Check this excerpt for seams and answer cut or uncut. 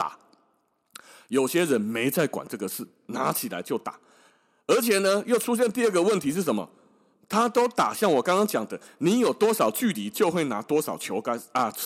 uncut